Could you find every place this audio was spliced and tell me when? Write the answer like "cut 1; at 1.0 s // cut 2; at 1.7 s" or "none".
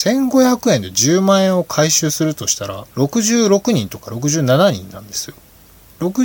cut 1; at 2.9 s